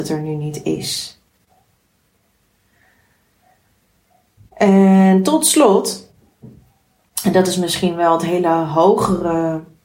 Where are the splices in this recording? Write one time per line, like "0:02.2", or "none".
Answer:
none